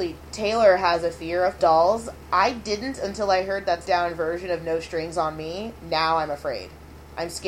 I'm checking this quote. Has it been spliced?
yes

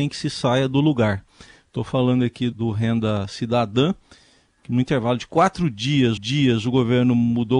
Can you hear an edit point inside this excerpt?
yes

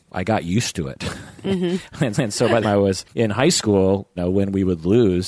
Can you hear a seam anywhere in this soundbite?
yes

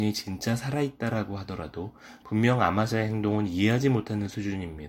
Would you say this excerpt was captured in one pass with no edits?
no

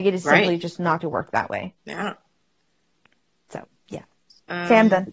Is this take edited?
yes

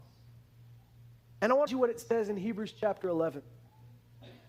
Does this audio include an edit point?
yes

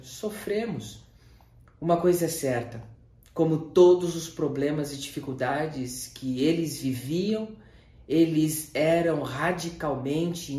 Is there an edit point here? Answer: no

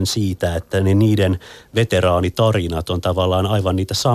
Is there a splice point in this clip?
no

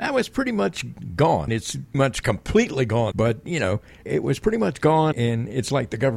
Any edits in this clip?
yes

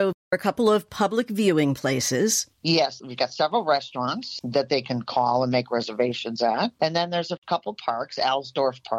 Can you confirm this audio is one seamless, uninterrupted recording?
no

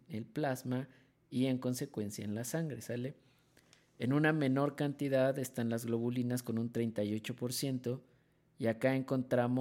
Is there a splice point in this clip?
no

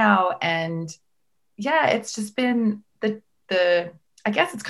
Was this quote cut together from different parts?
no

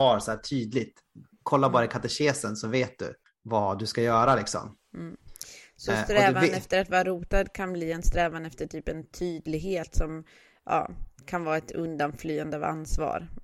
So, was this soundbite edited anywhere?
no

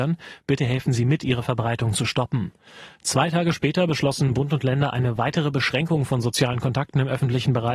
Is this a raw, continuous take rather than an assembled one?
yes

